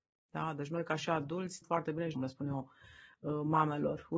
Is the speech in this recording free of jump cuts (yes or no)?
no